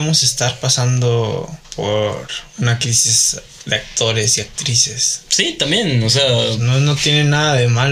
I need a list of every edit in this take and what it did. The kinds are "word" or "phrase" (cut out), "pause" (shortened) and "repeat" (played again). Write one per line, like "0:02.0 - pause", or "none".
0:01.6 - pause